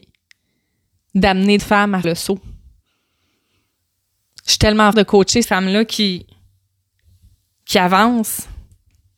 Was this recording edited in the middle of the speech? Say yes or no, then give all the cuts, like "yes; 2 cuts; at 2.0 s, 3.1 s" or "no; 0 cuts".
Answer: yes; 4 cuts; at 1.6 s, 2.0 s, 4.9 s, 5.4 s